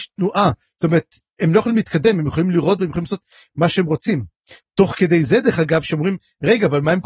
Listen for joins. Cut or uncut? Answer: uncut